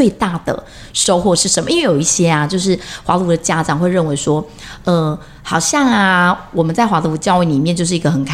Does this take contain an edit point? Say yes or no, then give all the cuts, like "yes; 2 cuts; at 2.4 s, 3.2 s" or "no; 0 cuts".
no; 0 cuts